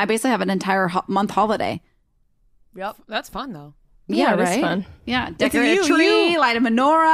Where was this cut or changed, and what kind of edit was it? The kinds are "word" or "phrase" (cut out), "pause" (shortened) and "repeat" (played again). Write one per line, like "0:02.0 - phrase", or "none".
none